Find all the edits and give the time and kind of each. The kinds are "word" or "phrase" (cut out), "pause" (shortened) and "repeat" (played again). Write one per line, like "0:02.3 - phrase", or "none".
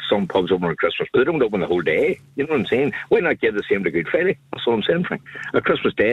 0:01.1 - word
0:04.4 - pause